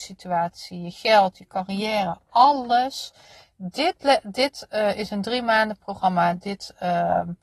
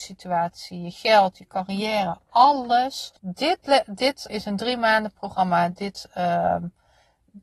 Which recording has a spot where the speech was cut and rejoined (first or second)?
second